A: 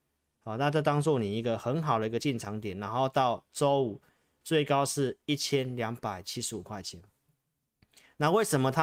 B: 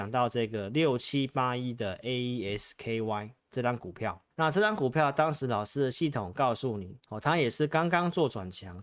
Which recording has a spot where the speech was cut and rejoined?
B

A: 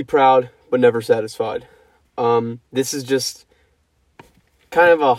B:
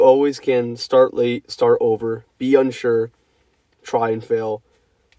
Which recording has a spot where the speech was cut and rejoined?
A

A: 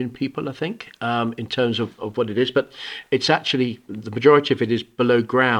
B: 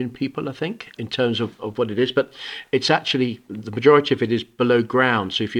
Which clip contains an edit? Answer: B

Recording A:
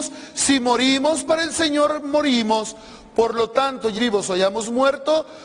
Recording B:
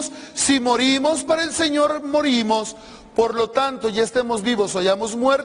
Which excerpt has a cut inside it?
A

